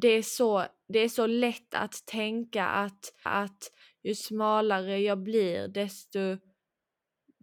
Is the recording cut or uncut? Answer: cut